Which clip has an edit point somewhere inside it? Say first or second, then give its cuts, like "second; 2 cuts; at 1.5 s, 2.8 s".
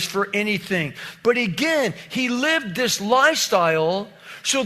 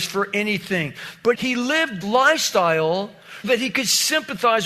second; 3 cuts; at 1.3 s, 2.0 s, 3.4 s